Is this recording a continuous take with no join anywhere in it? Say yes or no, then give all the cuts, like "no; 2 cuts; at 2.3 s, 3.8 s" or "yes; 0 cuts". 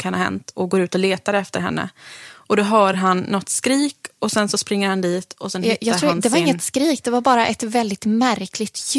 yes; 0 cuts